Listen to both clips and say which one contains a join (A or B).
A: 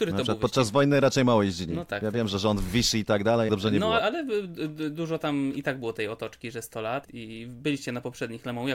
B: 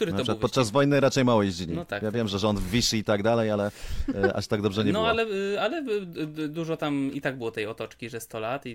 A